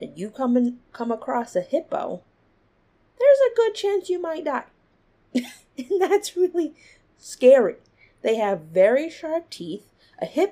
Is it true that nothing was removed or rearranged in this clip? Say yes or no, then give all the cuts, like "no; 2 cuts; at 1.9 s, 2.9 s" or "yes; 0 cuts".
yes; 0 cuts